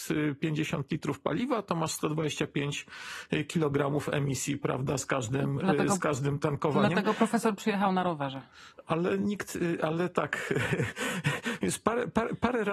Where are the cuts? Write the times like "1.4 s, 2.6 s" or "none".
none